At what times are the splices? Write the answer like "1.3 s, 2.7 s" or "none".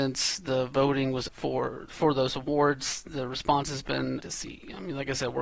1.3 s, 1.9 s, 4.2 s